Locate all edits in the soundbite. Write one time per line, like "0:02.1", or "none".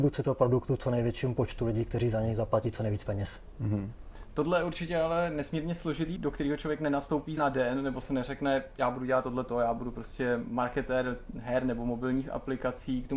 0:06.2
0:07.4